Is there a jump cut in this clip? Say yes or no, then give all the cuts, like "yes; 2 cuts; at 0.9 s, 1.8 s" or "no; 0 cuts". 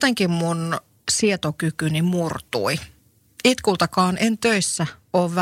no; 0 cuts